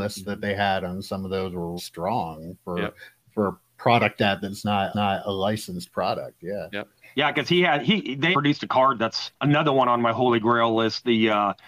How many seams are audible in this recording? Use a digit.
6